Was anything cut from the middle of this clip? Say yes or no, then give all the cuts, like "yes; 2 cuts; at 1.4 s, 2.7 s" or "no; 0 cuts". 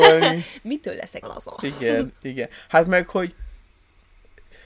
yes; 1 cut; at 1.2 s